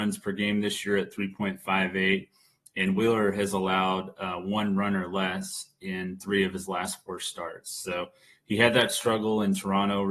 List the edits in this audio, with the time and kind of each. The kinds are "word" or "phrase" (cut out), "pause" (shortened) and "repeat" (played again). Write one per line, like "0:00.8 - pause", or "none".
none